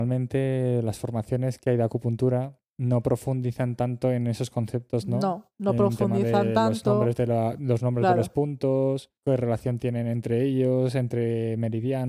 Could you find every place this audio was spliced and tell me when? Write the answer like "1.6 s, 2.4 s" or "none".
5.5 s, 9.2 s